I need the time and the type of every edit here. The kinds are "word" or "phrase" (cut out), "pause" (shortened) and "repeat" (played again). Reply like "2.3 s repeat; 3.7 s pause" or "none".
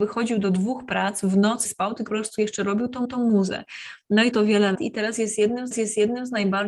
1.6 s word; 2.1 s word; 3.0 s repeat; 4.3 s phrase; 4.7 s word; 5.7 s repeat